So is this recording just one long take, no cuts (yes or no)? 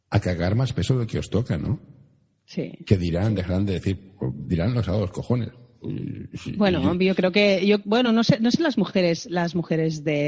yes